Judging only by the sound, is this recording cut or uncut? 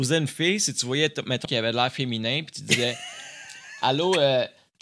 cut